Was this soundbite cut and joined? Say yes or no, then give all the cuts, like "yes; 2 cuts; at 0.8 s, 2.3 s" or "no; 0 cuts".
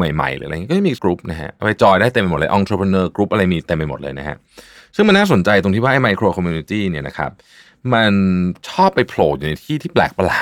yes; 1 cut; at 1.0 s